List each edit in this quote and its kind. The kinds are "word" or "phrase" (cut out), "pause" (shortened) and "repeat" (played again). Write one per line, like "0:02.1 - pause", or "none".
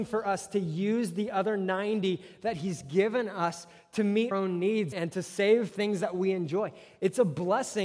0:04.3 - word
0:04.9 - word
0:05.7 - word